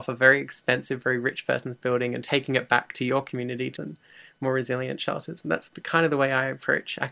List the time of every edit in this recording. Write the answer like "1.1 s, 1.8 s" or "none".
3.8 s